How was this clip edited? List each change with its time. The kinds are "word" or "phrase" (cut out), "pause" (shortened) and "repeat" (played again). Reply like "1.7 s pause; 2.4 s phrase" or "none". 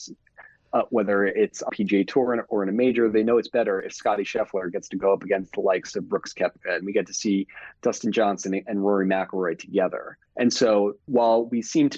1.7 s word; 10.3 s pause; 11.0 s pause